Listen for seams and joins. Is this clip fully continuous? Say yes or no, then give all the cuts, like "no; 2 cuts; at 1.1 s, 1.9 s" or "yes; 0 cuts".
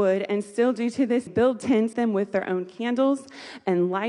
no; 2 cuts; at 1.3 s, 1.9 s